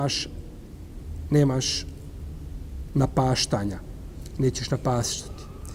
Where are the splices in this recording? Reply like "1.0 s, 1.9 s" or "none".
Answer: none